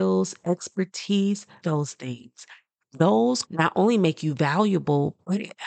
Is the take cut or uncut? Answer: cut